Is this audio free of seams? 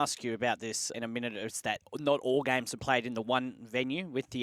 no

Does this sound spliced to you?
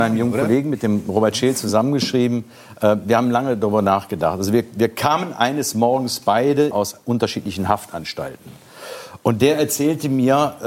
yes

